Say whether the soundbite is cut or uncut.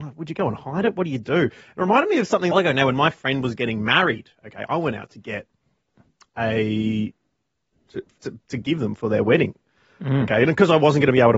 cut